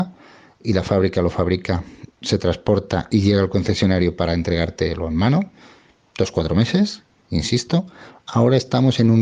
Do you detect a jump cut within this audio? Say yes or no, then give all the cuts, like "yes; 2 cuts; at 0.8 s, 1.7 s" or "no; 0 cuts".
no; 0 cuts